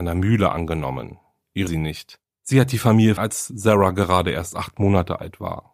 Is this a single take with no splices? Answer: no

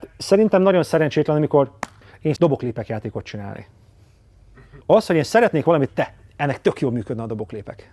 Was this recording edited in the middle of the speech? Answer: yes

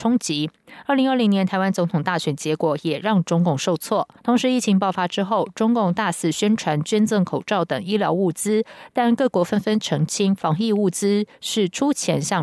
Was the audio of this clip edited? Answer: yes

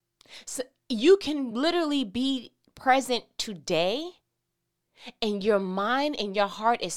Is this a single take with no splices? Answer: yes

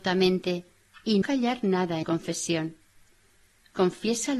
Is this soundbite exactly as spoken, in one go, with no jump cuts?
no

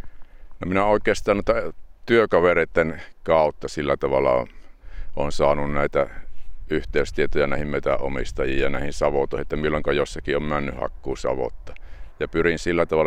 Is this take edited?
no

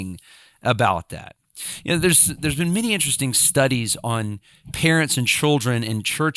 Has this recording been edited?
no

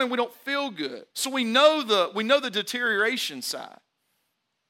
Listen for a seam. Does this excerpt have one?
yes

